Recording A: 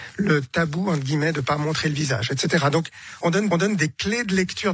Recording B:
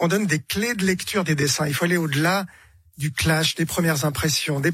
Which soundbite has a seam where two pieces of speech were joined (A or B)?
A